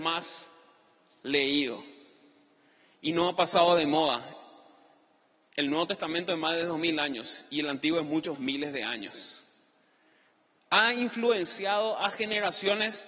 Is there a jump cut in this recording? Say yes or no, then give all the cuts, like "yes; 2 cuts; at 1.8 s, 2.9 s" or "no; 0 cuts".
yes; 1 cut; at 8.3 s